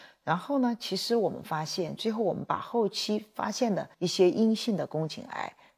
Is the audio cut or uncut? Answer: cut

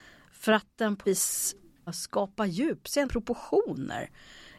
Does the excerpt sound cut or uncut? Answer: cut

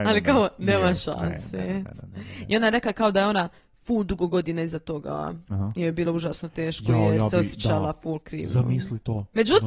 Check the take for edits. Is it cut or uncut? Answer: uncut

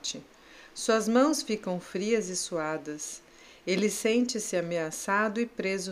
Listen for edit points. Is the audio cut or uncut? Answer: uncut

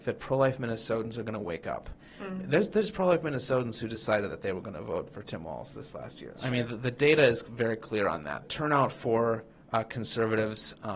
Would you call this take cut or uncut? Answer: cut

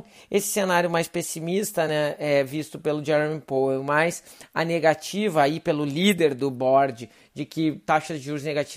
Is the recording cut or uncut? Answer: uncut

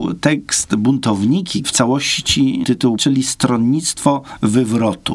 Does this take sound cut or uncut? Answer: cut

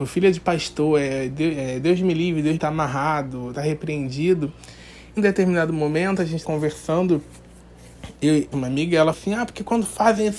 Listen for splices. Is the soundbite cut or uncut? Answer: cut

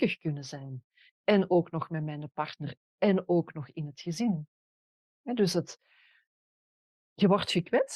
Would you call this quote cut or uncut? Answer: uncut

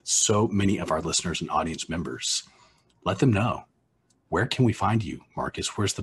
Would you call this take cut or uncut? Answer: uncut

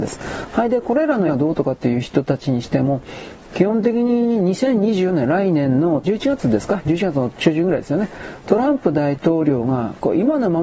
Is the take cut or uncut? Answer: cut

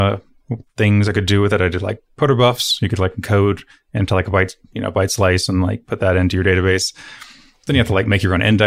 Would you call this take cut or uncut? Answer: uncut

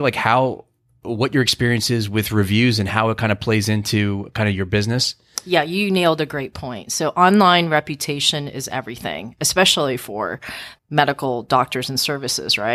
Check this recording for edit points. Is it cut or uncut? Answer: cut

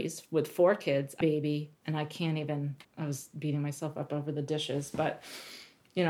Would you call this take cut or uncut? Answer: cut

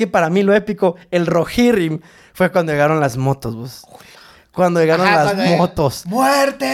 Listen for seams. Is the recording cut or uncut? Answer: uncut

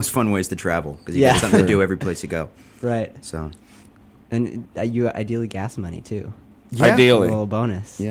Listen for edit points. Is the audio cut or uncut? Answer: cut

